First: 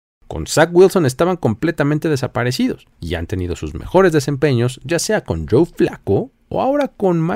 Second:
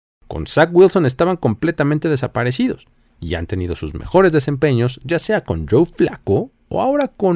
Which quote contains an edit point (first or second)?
first